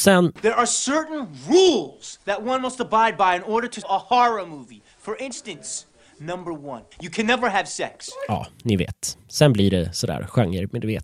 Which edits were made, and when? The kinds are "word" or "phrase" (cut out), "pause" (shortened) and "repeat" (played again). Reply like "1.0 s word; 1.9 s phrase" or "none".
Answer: 3.8 s phrase; 6.9 s pause